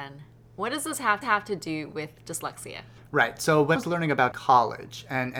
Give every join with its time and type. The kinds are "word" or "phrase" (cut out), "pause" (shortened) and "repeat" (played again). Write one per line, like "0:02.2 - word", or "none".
0:01.2 - repeat
0:03.0 - pause
0:03.8 - word
0:04.3 - phrase

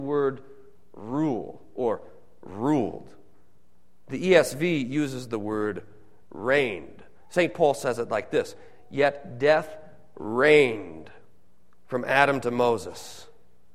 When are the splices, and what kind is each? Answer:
none

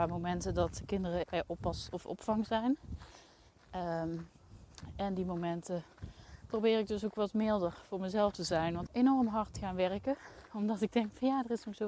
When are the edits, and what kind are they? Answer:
0:01.2 - word
0:08.9 - phrase

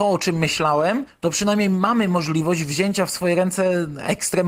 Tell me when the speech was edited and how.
none

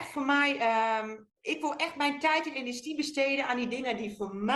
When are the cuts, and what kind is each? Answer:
0:01.3 - pause

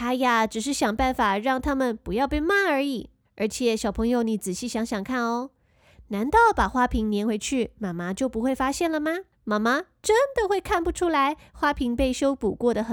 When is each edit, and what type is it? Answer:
0:03.3 - pause
0:09.3 - pause

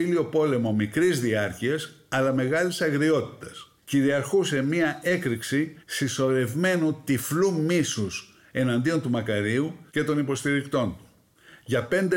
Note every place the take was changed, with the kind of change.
0:03.8 - pause
0:05.8 - pause
0:09.9 - pause

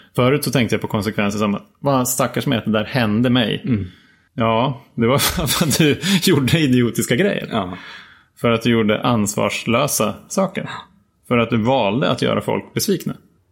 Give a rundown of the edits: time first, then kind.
none

